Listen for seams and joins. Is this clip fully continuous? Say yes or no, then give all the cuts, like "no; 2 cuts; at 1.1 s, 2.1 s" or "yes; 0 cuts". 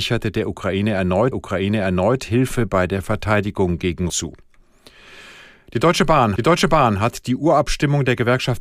no; 3 cuts; at 1.3 s, 4.1 s, 6.4 s